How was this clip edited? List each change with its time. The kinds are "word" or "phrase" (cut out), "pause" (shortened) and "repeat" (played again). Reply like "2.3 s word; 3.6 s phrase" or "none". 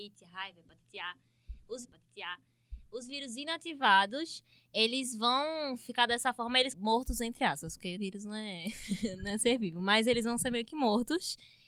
1.8 s repeat; 6.7 s phrase; 8.0 s word